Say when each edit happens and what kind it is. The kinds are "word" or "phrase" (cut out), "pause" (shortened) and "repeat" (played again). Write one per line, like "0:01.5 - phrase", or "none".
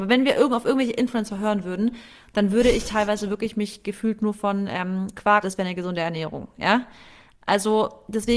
0:05.4 - phrase

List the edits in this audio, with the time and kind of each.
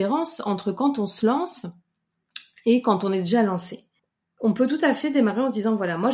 0:04.0 - pause

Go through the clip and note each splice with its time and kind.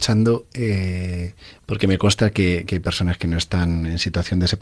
none

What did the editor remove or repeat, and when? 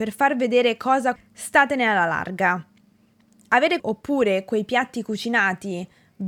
0:01.2 - phrase
0:03.8 - phrase

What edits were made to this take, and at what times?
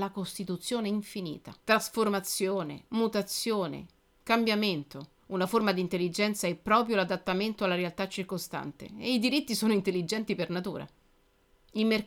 0:01.6 - pause
0:05.2 - pause

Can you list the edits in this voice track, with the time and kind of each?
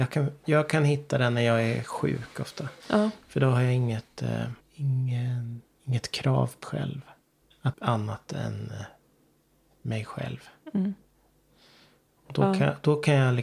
0:02.8 - pause
0:04.6 - pause
0:06.6 - word
0:07.7 - phrase

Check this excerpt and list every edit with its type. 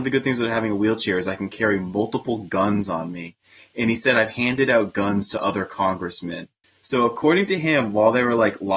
none

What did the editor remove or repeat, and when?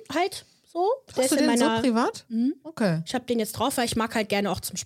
none

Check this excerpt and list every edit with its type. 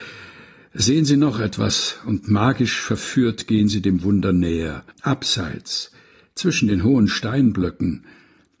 0:04.9 - pause

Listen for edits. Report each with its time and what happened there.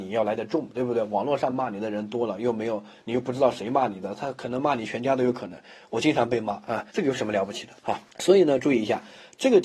0:06.9 - pause
0:08.1 - pause

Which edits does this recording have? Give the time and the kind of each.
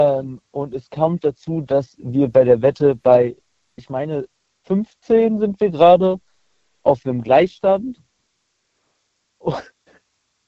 none

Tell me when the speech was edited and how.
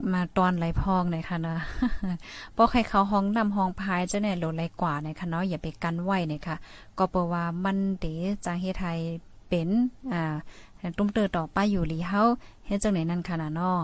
none

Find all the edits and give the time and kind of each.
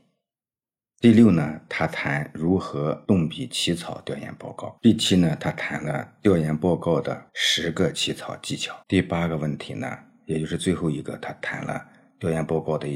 0:04.8 - pause
0:08.8 - pause

